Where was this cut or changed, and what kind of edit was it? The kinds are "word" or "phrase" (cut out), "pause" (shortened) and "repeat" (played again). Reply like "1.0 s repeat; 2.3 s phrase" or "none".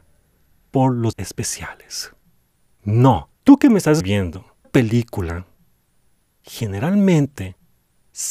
1.1 s word; 3.3 s pause; 4.0 s word; 4.6 s word